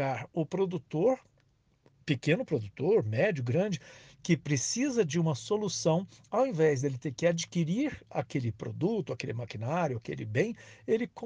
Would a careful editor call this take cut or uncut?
uncut